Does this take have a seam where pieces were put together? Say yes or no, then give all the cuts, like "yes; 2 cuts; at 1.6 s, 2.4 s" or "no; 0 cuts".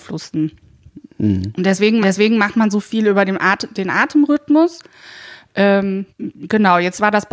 yes; 2 cuts; at 2.0 s, 6.1 s